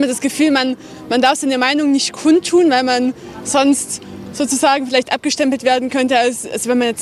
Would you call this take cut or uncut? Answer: uncut